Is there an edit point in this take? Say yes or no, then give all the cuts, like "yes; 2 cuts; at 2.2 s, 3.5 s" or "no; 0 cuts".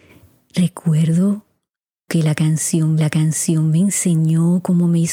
yes; 2 cuts; at 2.1 s, 3.0 s